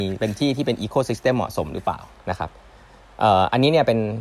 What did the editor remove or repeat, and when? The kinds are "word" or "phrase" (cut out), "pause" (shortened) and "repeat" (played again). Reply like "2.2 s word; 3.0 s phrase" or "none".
2.1 s pause